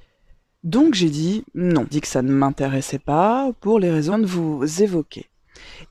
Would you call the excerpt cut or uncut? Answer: cut